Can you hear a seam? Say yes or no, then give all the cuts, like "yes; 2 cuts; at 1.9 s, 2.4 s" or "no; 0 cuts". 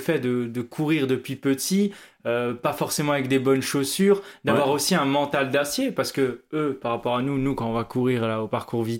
no; 0 cuts